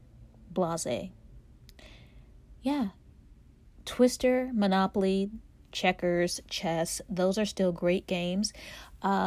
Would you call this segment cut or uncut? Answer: uncut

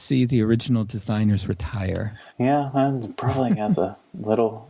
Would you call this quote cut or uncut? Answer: cut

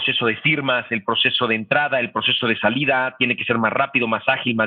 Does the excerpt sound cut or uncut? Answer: uncut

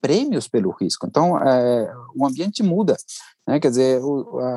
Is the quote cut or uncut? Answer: uncut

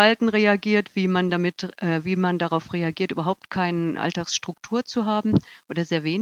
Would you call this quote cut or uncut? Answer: uncut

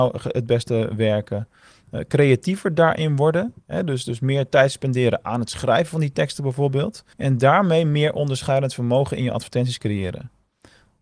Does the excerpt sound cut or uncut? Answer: cut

